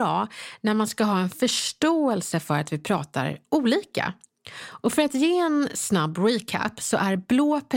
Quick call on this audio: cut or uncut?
uncut